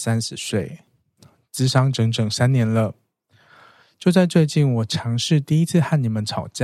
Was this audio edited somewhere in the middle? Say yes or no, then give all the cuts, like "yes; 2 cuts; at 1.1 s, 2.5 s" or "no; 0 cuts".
no; 0 cuts